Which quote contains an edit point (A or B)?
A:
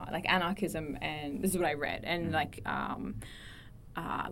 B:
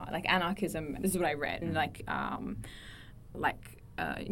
B